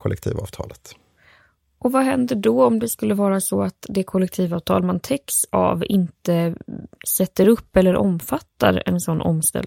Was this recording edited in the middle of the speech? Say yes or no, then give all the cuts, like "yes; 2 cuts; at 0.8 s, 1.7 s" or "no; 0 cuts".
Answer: no; 0 cuts